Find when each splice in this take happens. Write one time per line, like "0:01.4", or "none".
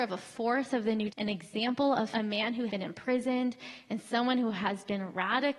0:01.1
0:02.1
0:02.7